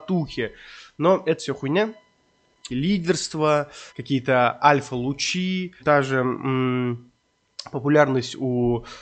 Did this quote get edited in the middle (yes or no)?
yes